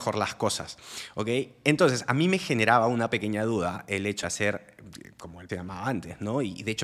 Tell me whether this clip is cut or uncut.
cut